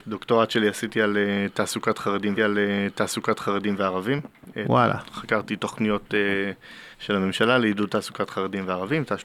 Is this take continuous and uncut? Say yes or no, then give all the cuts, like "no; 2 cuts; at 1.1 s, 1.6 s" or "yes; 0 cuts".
no; 2 cuts; at 2.4 s, 6.9 s